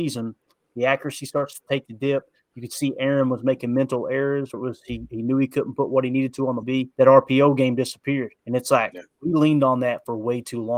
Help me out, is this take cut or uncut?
cut